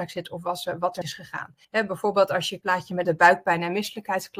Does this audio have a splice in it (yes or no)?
yes